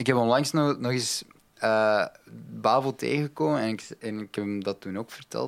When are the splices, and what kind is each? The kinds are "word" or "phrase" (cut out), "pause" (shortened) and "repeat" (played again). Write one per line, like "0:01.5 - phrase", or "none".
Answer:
none